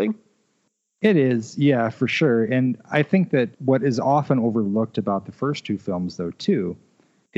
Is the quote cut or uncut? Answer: cut